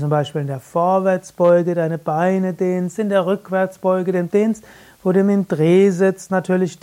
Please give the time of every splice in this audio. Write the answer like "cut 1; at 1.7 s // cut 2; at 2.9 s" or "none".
cut 1; at 4.3 s